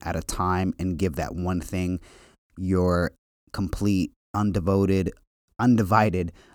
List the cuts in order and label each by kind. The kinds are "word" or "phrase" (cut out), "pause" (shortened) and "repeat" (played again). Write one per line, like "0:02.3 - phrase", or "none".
none